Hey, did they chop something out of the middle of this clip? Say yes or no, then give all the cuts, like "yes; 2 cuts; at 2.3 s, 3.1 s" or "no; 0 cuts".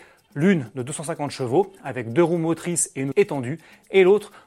yes; 1 cut; at 3.1 s